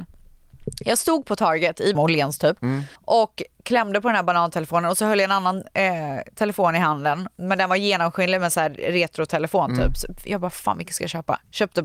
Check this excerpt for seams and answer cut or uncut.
cut